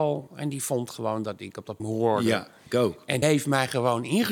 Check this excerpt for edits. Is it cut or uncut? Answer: cut